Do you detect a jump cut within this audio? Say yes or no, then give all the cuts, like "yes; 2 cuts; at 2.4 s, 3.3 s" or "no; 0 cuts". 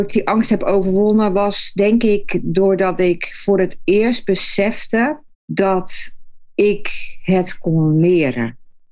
yes; 1 cut; at 5.3 s